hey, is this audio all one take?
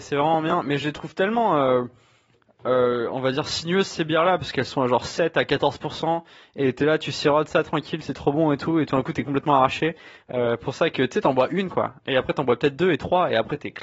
yes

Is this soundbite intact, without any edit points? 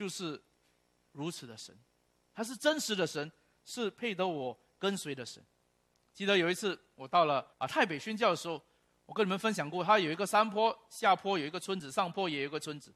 no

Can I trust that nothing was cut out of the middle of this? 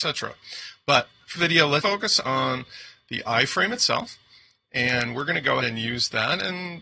no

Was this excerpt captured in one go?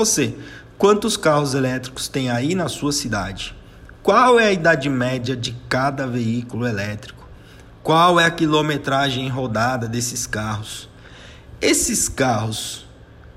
yes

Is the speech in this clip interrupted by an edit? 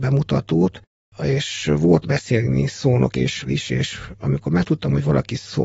yes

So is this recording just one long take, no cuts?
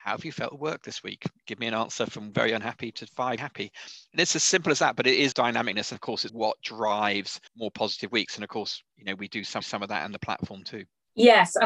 no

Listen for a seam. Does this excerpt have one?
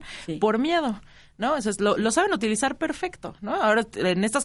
no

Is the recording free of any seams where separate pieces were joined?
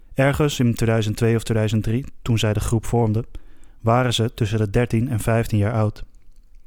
yes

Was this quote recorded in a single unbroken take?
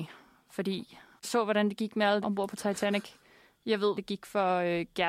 no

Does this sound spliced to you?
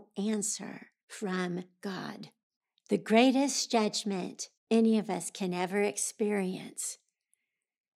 yes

